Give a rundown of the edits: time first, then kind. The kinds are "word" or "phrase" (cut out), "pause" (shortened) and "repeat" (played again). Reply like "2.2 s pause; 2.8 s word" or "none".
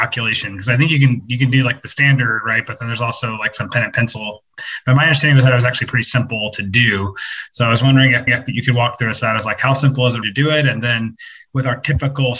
8.3 s repeat; 10.2 s word